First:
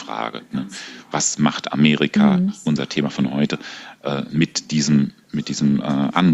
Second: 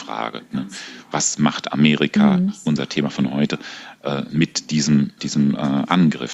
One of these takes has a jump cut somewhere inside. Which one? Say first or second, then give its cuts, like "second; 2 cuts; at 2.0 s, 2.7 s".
second; 1 cut; at 5.2 s